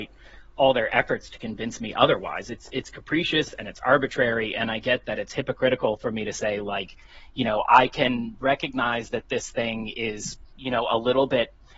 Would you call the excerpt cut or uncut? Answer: cut